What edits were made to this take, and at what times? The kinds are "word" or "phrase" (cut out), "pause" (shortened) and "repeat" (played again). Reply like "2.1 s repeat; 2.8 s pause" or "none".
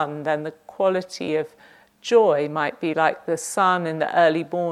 none